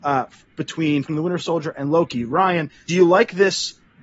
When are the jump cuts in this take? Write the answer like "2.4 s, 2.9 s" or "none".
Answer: 1.1 s, 2.9 s